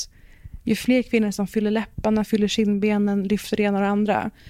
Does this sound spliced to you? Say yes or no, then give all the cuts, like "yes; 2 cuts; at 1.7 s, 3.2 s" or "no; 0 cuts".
no; 0 cuts